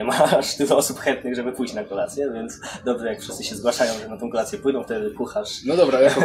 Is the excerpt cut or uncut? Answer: uncut